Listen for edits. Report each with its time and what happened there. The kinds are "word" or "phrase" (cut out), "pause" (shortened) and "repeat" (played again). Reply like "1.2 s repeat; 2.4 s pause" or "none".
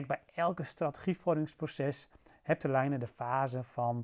2.6 s phrase